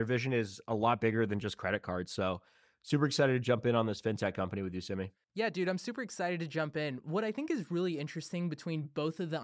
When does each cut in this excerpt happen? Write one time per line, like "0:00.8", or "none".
none

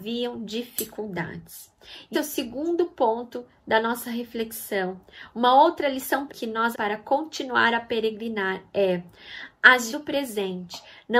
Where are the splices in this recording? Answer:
0:02.1
0:06.3
0:06.7
0:09.9

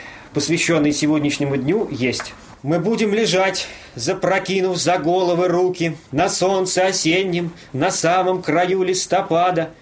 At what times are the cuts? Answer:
0:02.6
0:06.1

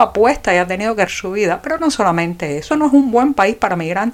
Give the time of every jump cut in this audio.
0:01.1
0:02.7

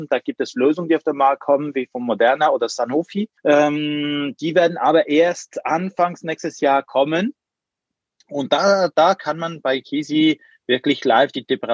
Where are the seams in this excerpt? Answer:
0:03.4

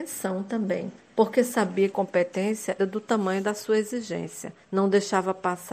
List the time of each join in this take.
0:01.0
0:01.9
0:02.8
0:04.6

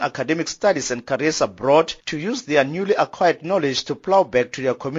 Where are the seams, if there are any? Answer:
0:02.0

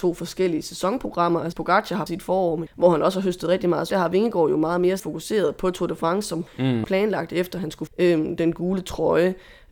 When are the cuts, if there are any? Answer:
0:01.5
0:02.1
0:02.7
0:03.9
0:05.0
0:06.5
0:06.8
0:07.9

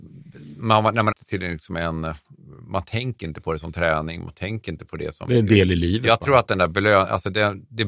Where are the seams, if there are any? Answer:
0:01.1

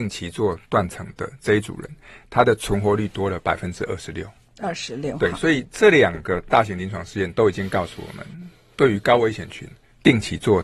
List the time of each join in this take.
none

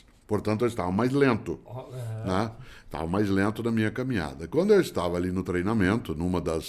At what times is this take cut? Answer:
none

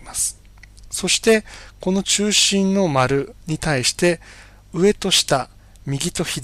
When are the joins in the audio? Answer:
none

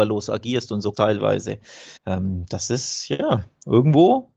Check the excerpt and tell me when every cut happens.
0:00.9
0:02.0

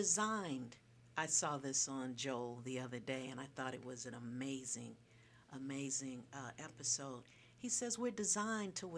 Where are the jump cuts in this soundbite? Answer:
none

